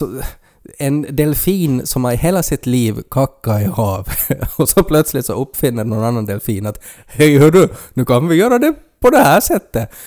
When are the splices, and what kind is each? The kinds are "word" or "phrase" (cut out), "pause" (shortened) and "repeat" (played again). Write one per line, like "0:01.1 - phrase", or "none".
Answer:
none